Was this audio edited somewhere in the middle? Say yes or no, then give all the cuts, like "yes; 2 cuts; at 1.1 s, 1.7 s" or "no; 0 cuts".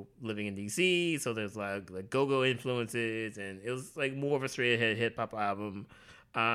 no; 0 cuts